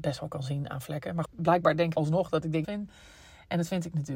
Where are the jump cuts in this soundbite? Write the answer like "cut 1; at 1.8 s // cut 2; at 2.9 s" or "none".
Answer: cut 1; at 1.2 s // cut 2; at 1.9 s // cut 3; at 2.6 s